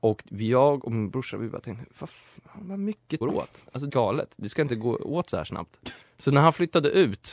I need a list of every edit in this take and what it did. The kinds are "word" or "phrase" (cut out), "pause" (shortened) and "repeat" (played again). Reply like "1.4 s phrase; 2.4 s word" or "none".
3.2 s phrase; 3.9 s phrase; 6.0 s pause